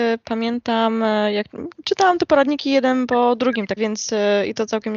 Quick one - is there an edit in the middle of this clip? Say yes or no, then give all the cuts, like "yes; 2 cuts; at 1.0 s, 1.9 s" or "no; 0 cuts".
yes; 1 cut; at 3.8 s